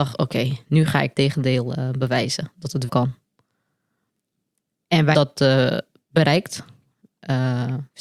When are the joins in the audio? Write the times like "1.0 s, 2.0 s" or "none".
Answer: 1.1 s, 2.9 s, 5.1 s